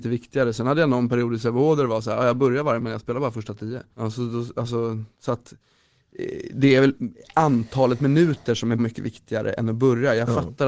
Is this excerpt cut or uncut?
cut